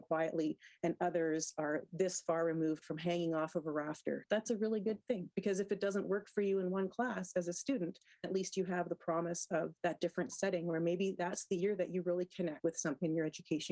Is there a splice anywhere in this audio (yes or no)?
yes